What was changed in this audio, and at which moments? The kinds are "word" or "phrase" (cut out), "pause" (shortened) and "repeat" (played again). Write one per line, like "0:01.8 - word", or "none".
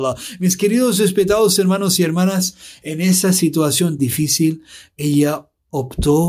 0:04.0 - word

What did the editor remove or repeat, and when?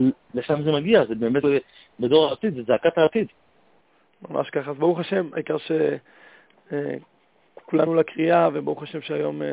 0:01.4 - word
0:07.9 - word

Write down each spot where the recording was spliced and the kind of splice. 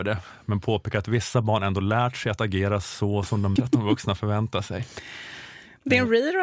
0:03.6 - word

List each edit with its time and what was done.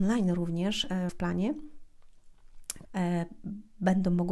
0:01.1 - word
0:02.8 - word

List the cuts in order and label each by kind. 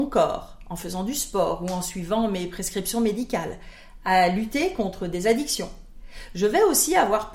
none

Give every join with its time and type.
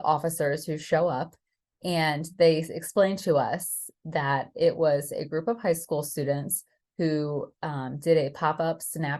none

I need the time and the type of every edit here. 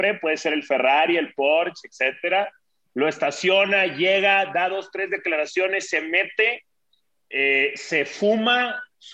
none

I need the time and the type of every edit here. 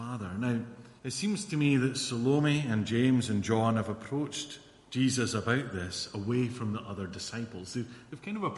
0:01.0 - pause

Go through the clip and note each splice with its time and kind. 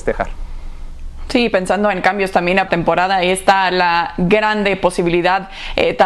0:02.7 - phrase

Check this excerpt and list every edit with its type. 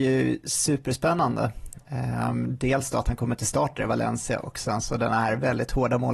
none

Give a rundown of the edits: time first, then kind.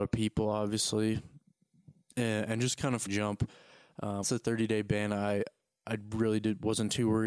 0:03.1 - phrase
0:04.2 - phrase

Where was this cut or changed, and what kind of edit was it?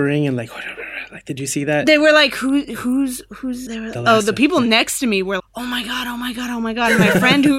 0:03.7 - word
0:05.4 - word

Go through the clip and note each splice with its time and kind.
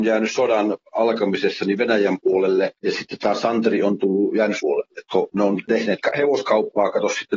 0:02.7 - pause
0:04.6 - word

